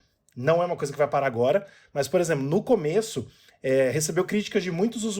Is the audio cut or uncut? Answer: uncut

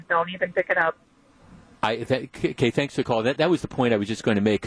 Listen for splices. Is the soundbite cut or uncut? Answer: uncut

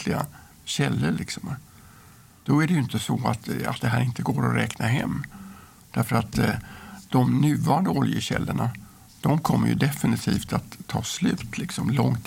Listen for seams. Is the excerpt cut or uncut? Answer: uncut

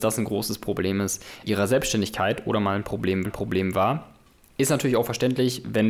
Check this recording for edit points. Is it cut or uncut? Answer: cut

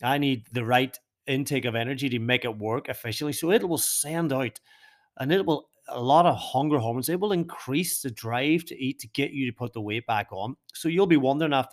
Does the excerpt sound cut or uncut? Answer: uncut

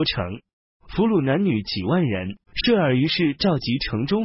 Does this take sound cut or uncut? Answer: cut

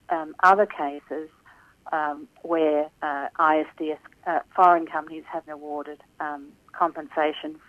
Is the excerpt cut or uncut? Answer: cut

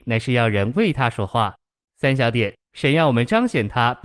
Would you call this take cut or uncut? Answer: cut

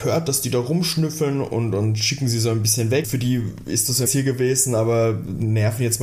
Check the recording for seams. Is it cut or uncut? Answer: cut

